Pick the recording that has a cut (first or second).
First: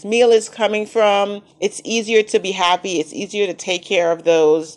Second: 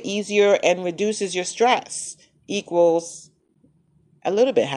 first